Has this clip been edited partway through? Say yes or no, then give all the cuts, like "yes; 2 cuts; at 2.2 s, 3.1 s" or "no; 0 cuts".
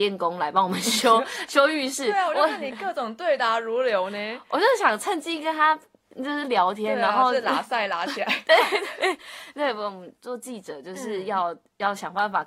no; 0 cuts